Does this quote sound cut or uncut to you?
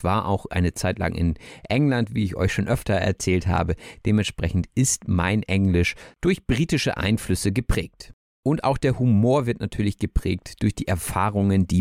uncut